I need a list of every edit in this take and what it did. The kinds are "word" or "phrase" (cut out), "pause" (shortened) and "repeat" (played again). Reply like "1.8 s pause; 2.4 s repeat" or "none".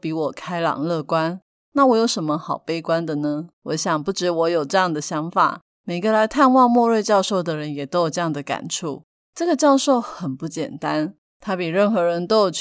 3.5 s pause